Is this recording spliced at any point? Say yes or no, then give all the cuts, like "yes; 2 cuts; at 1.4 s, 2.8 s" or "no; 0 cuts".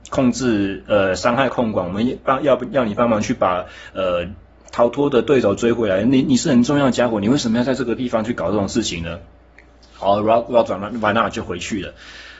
no; 0 cuts